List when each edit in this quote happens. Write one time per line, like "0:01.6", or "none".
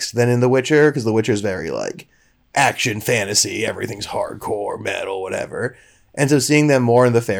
none

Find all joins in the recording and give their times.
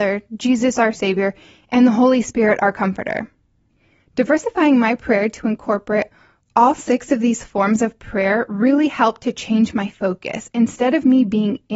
none

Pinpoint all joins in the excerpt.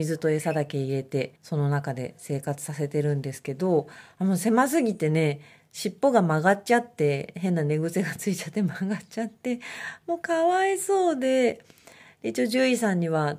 0:01.4

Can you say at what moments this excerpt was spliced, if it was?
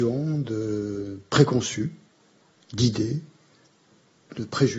none

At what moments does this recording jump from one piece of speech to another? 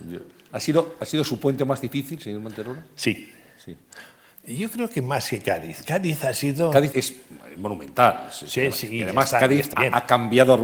0:06.9
0:09.7

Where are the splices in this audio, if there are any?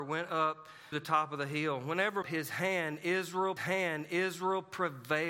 0:00.9
0:02.2
0:03.6

